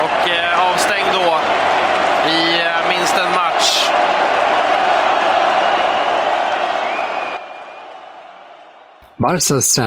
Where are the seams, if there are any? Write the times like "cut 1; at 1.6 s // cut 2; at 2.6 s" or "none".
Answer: none